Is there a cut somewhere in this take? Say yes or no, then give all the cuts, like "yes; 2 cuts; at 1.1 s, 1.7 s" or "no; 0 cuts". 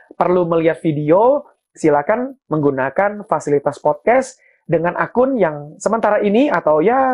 no; 0 cuts